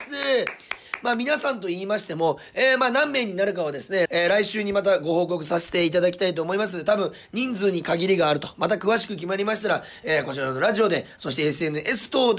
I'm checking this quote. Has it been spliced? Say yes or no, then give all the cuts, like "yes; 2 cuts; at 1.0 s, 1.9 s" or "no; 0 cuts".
no; 0 cuts